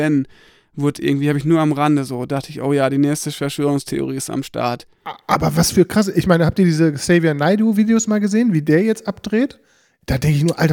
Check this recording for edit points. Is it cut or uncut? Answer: uncut